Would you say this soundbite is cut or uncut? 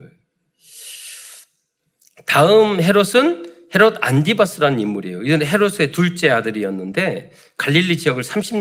uncut